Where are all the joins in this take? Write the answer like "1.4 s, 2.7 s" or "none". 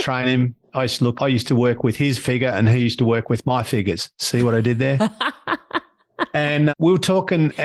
1.2 s, 6.7 s